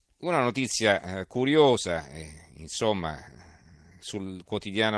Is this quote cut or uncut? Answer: uncut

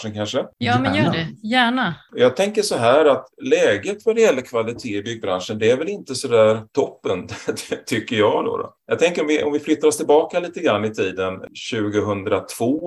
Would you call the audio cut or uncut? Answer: uncut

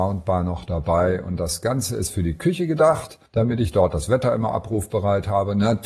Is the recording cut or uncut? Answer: cut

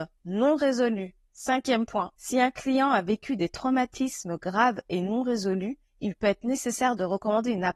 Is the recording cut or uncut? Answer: cut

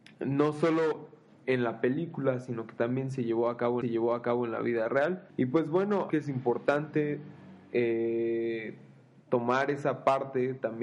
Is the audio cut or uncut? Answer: cut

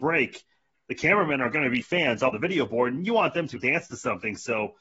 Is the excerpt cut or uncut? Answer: cut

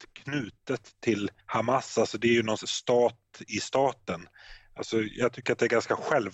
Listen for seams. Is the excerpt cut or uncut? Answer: cut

